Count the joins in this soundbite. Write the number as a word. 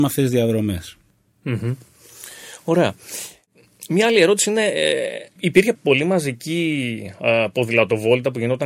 two